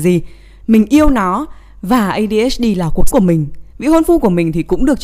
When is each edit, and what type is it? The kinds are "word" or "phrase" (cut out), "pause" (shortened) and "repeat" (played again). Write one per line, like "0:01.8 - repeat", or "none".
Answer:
0:03.1 - word
0:03.7 - pause